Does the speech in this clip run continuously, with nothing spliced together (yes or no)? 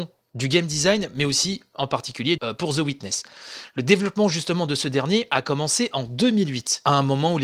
no